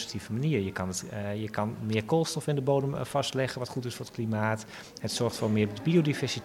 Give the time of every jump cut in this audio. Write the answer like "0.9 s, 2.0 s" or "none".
none